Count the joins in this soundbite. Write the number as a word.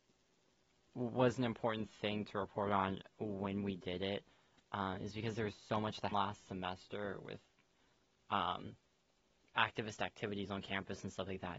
one